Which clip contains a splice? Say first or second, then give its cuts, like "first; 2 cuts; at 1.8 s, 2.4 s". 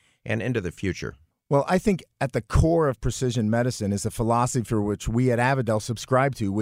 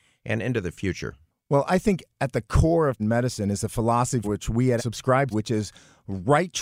second; 4 cuts; at 3.0 s, 4.2 s, 4.8 s, 5.3 s